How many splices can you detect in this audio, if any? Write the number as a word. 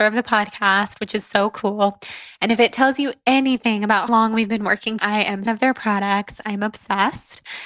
three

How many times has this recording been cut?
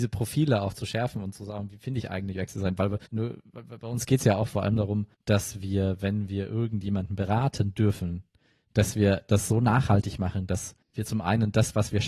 three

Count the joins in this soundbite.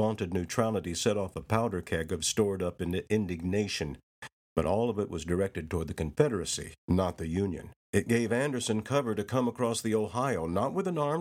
three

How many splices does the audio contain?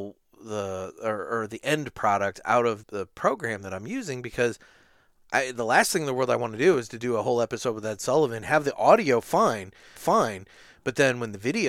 two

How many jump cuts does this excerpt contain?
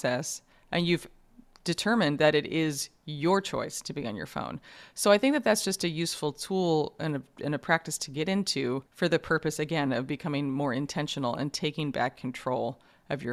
one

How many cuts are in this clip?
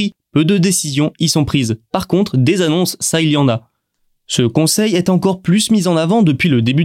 zero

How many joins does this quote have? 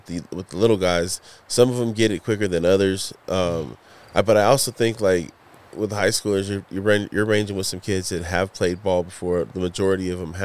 zero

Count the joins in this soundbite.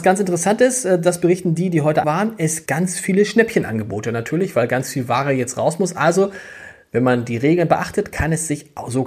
two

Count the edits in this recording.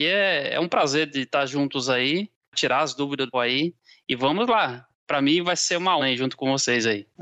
two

